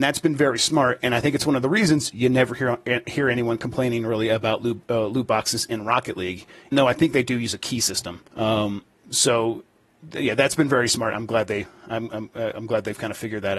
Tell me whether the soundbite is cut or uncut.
cut